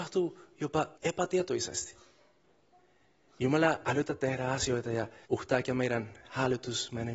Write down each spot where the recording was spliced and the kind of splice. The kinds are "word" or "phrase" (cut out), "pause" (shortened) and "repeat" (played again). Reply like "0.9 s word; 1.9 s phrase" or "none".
0.9 s pause; 5.2 s pause